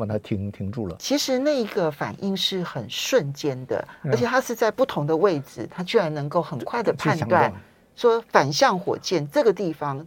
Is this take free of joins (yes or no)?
yes